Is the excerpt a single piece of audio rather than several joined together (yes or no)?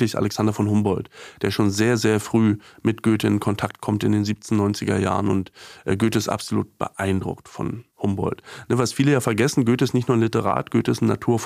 no